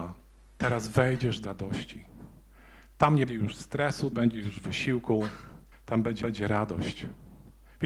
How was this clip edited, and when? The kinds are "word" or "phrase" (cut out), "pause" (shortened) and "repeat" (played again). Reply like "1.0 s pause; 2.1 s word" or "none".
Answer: 1.4 s word; 3.3 s word; 4.1 s phrase; 5.7 s pause; 6.2 s repeat